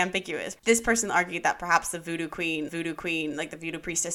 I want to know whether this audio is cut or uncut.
cut